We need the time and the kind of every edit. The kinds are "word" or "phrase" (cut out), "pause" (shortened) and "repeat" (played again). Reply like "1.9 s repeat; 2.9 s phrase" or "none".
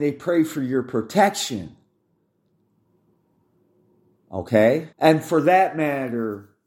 4.9 s pause